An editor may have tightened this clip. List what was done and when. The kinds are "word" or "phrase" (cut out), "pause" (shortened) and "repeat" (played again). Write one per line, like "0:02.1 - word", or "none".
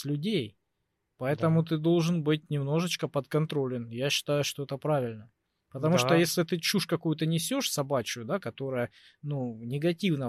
none